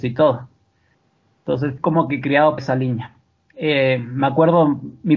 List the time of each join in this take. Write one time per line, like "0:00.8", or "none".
0:01.8
0:02.6